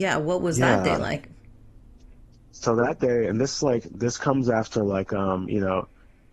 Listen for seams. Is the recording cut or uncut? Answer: uncut